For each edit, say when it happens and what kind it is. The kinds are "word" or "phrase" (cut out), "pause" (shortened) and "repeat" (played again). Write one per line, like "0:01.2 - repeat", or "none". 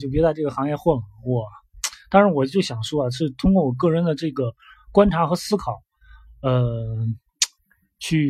none

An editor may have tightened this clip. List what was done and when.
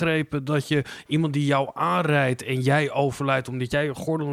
none

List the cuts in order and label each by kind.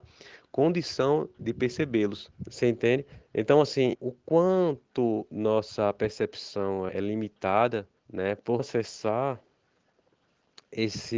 0:01.4 - word
0:02.3 - pause
0:03.9 - word
0:06.9 - word
0:08.0 - pause
0:08.6 - word

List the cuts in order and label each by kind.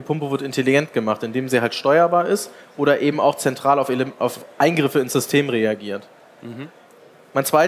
none

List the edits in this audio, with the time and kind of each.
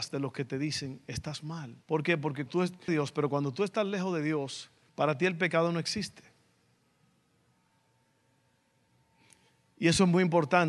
0:01.8 - pause
0:02.5 - word
0:02.9 - phrase
0:04.9 - pause

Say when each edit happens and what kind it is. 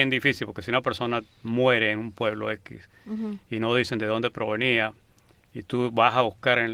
none

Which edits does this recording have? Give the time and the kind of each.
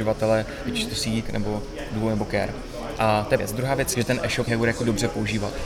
0:01.2 - word
0:03.4 - word
0:03.9 - word
0:04.5 - word

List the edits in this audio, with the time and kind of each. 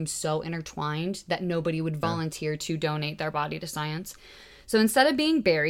none

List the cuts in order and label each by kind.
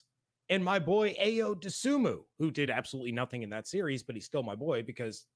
none

